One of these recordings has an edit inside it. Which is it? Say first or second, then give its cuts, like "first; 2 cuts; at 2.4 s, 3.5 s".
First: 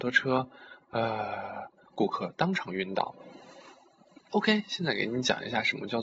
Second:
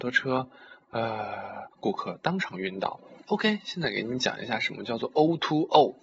second; 2 cuts; at 1.7 s, 3.2 s